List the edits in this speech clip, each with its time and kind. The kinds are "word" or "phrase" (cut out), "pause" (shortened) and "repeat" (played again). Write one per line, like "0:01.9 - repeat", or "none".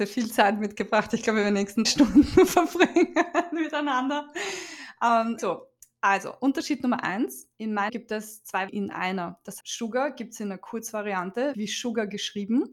0:01.8 - word
0:05.4 - phrase
0:07.5 - pause
0:07.9 - word
0:08.7 - word
0:09.6 - word
0:11.5 - word